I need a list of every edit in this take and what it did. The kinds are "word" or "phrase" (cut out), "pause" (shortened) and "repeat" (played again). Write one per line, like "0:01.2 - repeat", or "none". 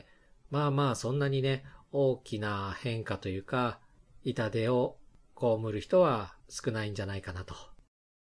0:06.4 - pause

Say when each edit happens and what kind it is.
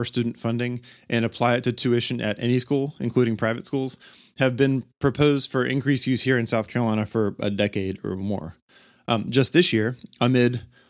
none

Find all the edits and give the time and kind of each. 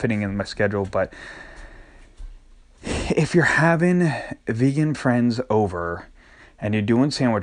none

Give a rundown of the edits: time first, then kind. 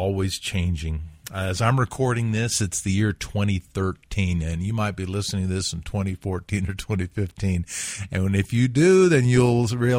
none

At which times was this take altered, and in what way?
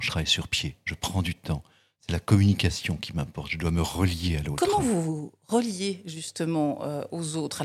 none

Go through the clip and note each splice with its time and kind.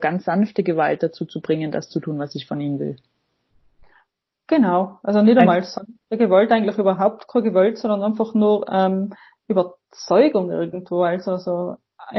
none

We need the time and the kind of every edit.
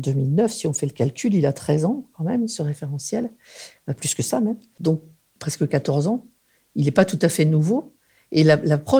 none

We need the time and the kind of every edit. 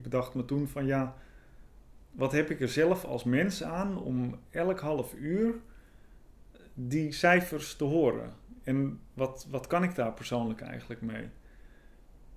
none

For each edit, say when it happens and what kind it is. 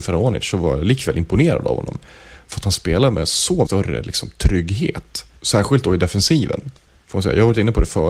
0:03.7 - word
0:05.4 - pause

